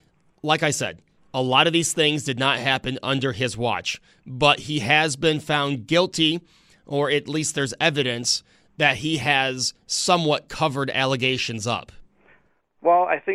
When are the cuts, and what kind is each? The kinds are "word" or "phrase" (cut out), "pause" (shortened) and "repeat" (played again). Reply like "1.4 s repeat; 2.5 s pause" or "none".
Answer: none